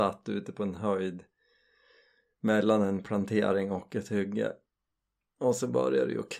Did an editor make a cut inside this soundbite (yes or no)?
no